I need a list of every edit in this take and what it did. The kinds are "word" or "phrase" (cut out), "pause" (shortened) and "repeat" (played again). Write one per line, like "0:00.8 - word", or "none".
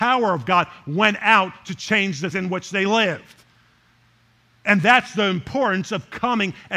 0:02.3 - word